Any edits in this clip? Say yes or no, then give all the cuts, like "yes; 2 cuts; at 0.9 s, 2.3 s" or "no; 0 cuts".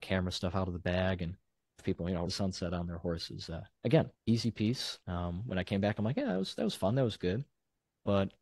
yes; 4 cuts; at 1.8 s, 2.3 s, 4.2 s, 5.0 s